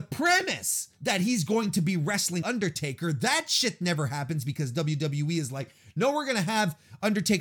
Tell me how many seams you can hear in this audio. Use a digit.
1